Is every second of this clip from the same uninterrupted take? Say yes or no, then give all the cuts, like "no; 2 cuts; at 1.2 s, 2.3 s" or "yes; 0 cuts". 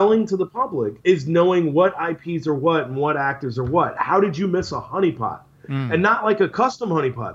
no; 1 cut; at 1.0 s